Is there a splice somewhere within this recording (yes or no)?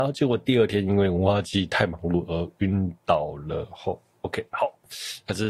no